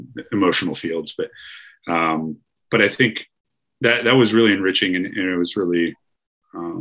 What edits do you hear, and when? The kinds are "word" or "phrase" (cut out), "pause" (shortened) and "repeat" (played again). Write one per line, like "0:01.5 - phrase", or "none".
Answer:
none